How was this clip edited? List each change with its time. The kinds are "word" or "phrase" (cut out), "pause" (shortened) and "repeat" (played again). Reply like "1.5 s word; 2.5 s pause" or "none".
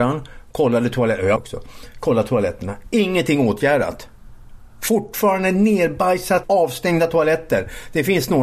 1.4 s phrase; 4.7 s pause; 6.4 s phrase